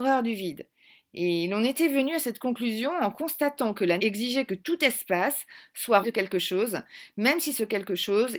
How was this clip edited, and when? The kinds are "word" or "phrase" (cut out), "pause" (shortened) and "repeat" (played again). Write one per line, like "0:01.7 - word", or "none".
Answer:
0:04.0 - word
0:06.0 - word